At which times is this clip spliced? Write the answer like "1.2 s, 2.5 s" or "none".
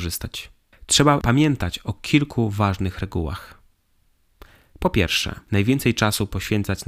none